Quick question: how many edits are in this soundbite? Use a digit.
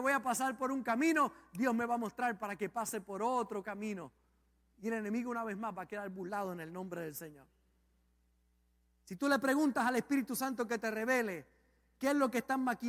0